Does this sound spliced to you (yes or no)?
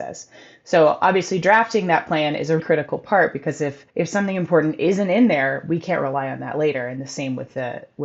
yes